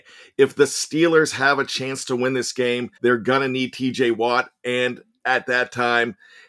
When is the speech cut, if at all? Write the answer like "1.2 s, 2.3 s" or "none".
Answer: 3.0 s